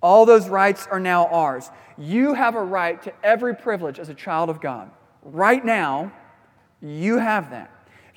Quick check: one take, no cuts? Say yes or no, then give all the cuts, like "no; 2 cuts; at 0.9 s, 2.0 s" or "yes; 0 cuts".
yes; 0 cuts